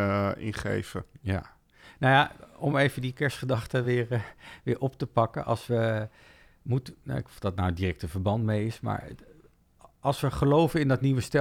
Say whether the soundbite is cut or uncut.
uncut